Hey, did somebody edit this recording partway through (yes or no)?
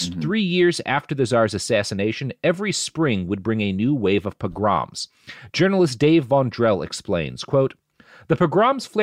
no